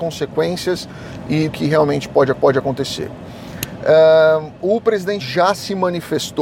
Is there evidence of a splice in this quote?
yes; 3 cuts; at 1.5 s, 2.3 s, 5.2 s

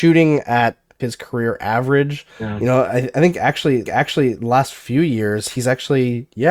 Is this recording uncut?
no; 3 cuts; at 1.0 s, 2.3 s, 3.9 s

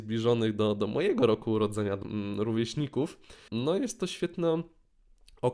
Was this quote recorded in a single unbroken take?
no; 2 cuts; at 2.0 s, 3.5 s

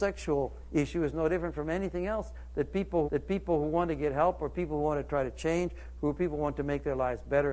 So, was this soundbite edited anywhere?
yes; 1 cut; at 3.0 s

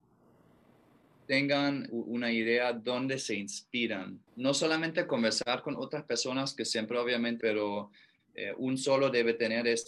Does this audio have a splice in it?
yes; 2 cuts; at 4.3 s, 7.4 s

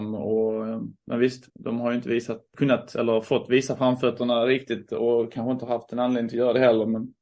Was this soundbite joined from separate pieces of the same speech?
yes; 2 cuts; at 1.5 s, 2.5 s

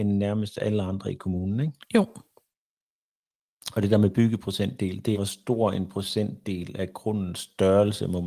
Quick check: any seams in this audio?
yes; 2 cuts; at 1.8 s, 5.1 s

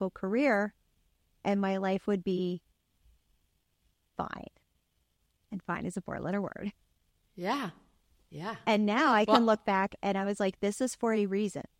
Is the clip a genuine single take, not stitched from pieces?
yes; 0 cuts

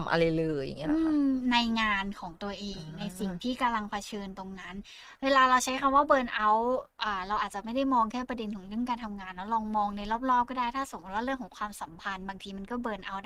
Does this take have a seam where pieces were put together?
no; 0 cuts

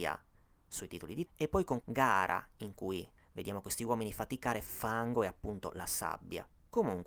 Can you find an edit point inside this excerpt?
yes; 3 cuts; at 1.3 s, 1.8 s, 4.7 s

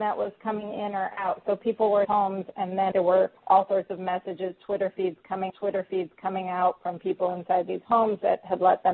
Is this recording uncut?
no; 4 cuts; at 2.0 s, 2.9 s, 3.4 s, 5.5 s

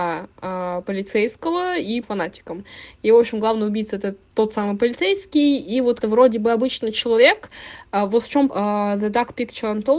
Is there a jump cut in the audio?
yes; 3 cuts; at 2.0 s, 6.0 s, 8.5 s

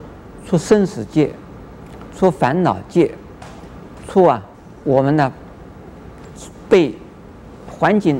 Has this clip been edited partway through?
yes; 1 cut; at 4.5 s

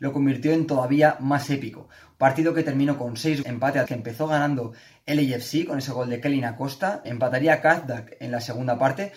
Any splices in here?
yes; 3 cuts; at 3.4 s, 3.9 s, 7.0 s

